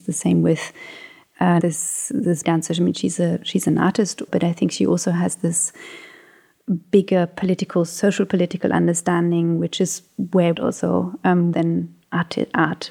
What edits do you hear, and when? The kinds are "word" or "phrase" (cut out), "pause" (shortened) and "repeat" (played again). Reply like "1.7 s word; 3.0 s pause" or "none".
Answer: 1.6 s word; 2.4 s word; 4.3 s word; 10.5 s phrase; 11.5 s phrase